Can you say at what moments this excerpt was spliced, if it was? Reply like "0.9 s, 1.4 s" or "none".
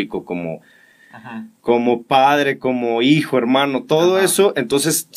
none